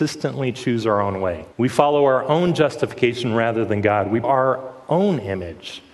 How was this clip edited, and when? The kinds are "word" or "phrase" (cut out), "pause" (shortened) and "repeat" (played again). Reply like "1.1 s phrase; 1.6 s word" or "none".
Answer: 1.5 s pause; 4.2 s word